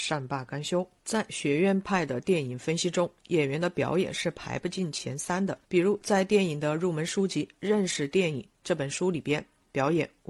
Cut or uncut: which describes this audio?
cut